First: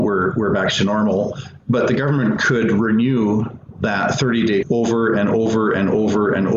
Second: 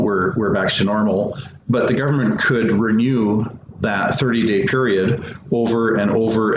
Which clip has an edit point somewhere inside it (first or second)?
first